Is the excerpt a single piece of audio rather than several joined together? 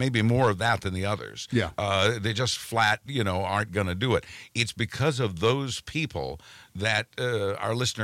yes; 0 cuts

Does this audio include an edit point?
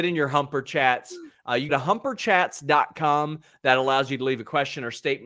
yes; 1 cut; at 1.7 s

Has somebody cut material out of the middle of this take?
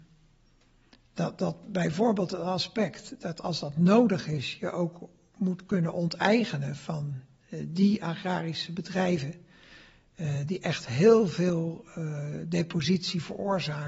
no; 0 cuts

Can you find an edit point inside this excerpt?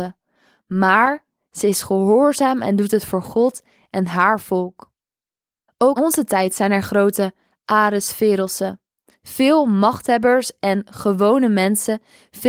yes; 1 cut; at 6.0 s

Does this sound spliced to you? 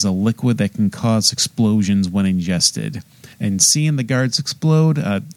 yes; 1 cut; at 3.3 s

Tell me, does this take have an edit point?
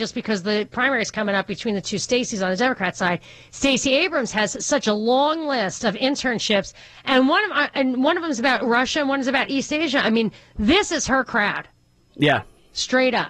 no; 0 cuts

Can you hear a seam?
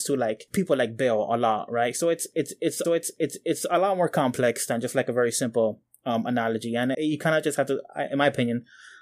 yes; 2 cuts; at 2.8 s, 6.9 s

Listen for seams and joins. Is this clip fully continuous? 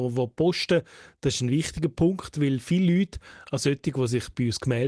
yes; 0 cuts

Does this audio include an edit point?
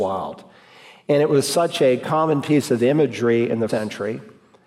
yes; 1 cut; at 3.7 s

